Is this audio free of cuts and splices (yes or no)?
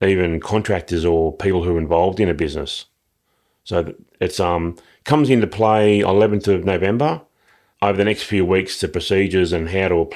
yes